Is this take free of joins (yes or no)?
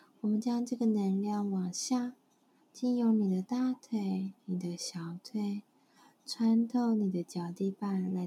yes